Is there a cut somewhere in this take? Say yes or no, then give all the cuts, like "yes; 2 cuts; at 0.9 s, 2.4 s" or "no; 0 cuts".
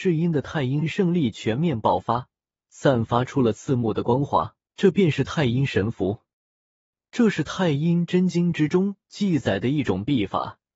yes; 1 cut; at 4.7 s